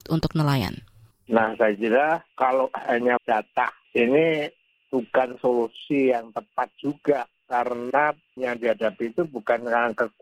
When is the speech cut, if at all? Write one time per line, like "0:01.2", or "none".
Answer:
0:03.2
0:03.8
0:08.4